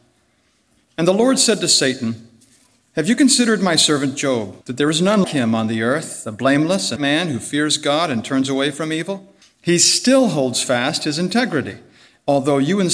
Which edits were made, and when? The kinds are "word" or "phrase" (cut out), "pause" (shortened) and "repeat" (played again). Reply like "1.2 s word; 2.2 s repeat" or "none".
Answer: 4.6 s pause; 5.2 s word; 7.0 s word; 9.4 s pause